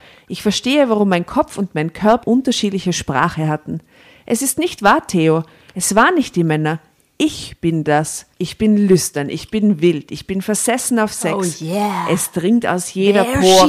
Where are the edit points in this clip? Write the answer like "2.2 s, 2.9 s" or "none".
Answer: 2.2 s, 8.3 s